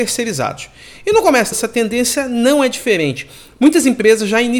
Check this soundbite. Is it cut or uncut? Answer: cut